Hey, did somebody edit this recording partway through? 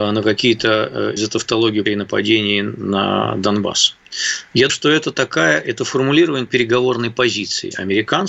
yes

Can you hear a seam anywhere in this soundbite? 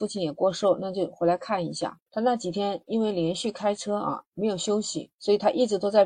yes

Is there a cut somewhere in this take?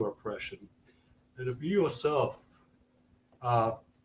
no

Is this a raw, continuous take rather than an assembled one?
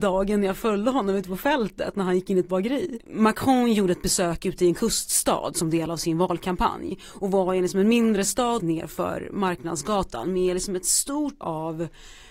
no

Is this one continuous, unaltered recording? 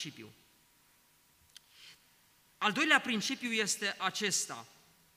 yes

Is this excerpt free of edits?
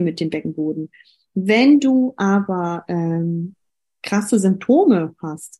yes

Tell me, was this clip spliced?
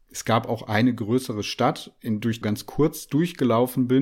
yes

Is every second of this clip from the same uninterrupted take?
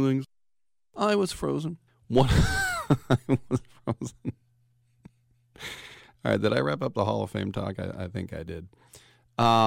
no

